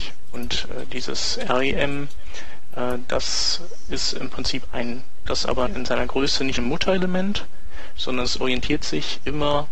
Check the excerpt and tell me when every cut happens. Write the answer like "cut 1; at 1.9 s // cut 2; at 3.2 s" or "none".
cut 1; at 5.3 s // cut 2; at 5.7 s // cut 3; at 6.6 s